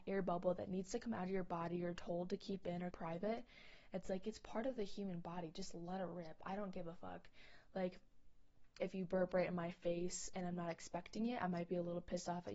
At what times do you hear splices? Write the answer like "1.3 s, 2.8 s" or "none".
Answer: 2.9 s, 8.8 s